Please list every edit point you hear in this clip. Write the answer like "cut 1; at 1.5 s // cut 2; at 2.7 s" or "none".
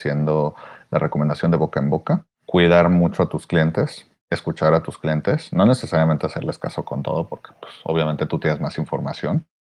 none